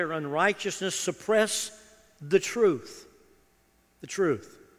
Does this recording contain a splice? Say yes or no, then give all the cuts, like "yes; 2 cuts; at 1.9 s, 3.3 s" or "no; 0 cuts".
no; 0 cuts